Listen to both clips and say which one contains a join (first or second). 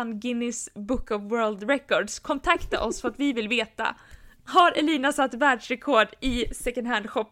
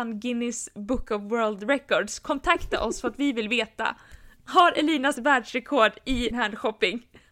second